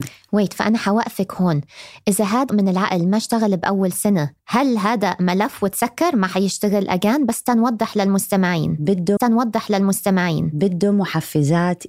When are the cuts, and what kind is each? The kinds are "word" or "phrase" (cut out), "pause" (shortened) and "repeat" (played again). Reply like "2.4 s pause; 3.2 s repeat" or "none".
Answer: 2.5 s word; 4.4 s pause; 9.2 s repeat